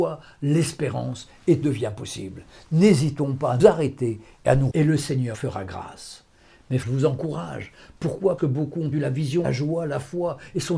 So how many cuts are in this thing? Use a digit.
8